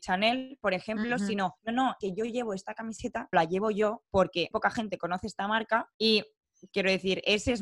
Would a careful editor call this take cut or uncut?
cut